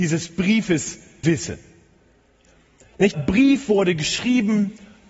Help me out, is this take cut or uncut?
cut